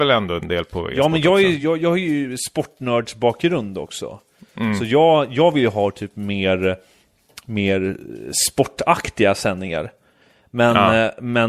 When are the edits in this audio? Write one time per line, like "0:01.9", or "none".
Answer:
none